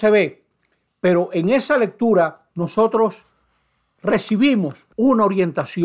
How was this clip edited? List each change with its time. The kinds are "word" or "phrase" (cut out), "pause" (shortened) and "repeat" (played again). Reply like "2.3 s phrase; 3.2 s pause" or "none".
2.5 s pause; 4.9 s pause